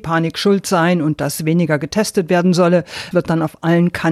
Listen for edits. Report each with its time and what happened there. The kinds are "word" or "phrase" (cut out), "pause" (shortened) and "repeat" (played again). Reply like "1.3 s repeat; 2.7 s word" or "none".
3.1 s phrase